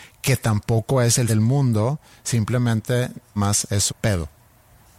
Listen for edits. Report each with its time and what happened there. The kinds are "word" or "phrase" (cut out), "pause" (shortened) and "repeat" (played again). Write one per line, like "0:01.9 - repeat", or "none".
0:01.3 - word
0:03.4 - word
0:03.9 - word